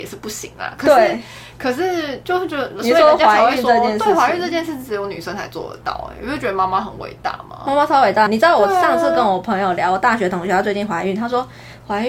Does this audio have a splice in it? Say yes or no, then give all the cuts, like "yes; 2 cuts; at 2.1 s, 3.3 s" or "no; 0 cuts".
yes; 1 cut; at 8.3 s